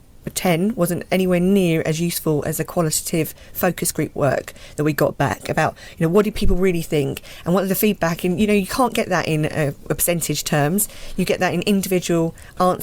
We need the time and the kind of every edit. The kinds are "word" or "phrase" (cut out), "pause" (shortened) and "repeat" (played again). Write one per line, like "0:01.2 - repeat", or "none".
none